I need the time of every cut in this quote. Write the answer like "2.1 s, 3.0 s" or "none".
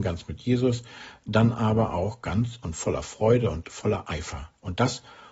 none